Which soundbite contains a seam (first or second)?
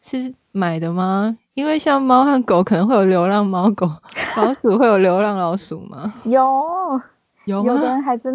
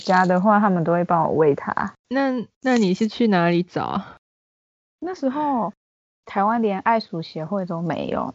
second